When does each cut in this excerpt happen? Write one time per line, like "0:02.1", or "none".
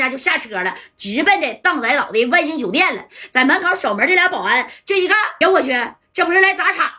0:05.4